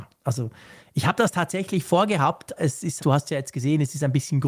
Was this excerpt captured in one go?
no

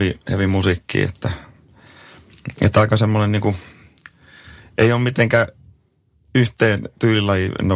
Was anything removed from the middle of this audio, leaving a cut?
no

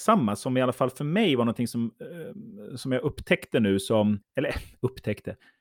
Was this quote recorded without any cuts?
no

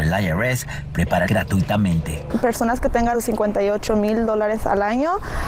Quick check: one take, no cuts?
no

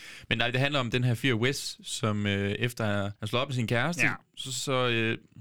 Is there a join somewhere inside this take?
yes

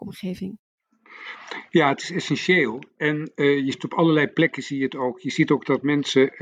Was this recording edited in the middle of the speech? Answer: yes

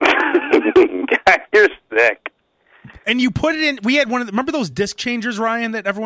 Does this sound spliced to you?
no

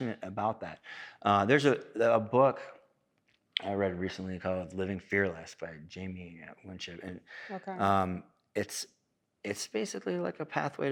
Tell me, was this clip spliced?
no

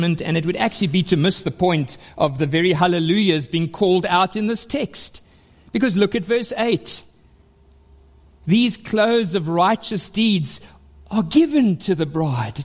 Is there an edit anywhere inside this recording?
no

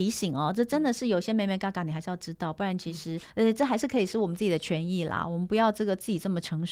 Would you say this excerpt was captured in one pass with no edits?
no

